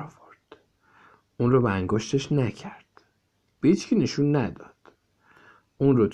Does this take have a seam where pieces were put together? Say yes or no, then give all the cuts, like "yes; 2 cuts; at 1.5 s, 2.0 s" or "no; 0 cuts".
no; 0 cuts